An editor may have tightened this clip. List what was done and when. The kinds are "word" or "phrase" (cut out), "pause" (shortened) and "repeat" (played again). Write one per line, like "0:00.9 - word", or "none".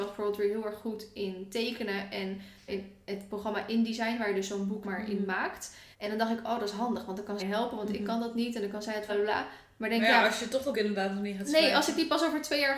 0:02.7 - word
0:04.8 - word
0:05.9 - pause
0:07.4 - phrase
0:09.1 - phrase
0:10.7 - word